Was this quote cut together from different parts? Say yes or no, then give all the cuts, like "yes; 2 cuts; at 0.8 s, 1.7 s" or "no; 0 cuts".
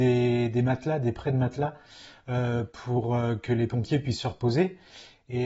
no; 0 cuts